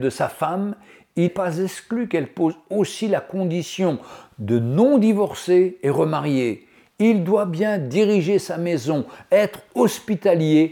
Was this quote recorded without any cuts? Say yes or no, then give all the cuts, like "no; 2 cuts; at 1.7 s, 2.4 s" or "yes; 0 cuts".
no; 1 cut; at 1.3 s